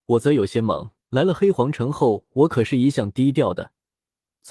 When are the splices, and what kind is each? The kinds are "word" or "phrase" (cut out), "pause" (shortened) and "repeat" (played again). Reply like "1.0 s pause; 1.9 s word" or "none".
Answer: 1.0 s pause